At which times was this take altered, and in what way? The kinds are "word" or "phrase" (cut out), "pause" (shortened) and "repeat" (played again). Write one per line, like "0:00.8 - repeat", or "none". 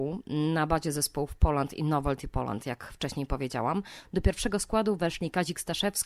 none